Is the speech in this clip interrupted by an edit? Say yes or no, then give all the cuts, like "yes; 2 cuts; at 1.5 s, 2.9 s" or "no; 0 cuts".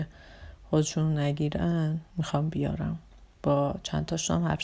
no; 0 cuts